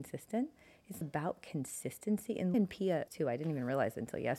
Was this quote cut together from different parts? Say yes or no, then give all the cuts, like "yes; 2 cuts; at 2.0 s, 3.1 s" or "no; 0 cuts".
yes; 3 cuts; at 1.0 s, 2.5 s, 3.1 s